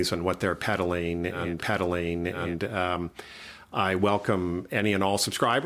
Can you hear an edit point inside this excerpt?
yes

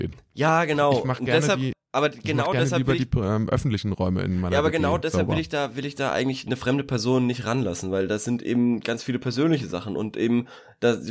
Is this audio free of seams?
yes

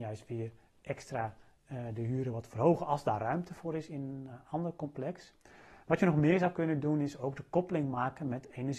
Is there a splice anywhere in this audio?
no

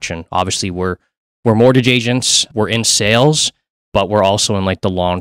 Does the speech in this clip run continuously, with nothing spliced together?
yes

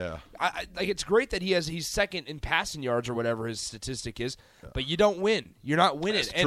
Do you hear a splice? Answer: no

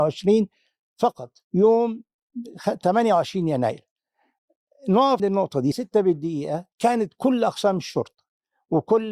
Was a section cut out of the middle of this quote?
yes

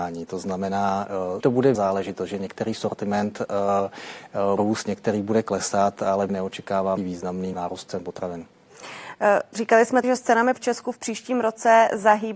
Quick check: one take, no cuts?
no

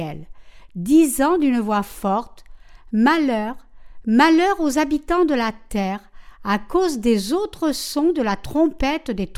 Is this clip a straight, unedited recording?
no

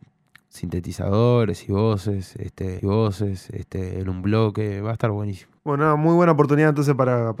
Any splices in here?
yes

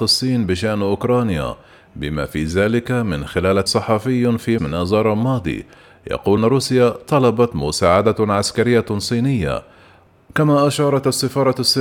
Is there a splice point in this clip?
yes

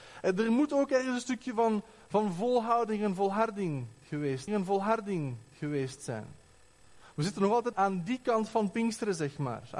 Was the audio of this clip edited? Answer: yes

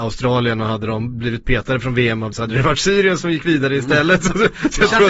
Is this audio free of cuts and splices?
no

